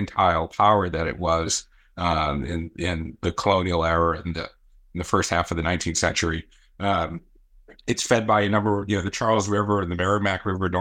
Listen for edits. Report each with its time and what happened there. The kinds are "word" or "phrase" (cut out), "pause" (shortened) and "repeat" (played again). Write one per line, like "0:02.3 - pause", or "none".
none